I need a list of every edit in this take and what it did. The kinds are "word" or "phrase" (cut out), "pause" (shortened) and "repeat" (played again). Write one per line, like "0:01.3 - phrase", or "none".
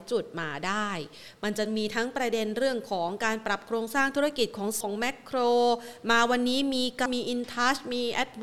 0:04.8 - word
0:07.1 - phrase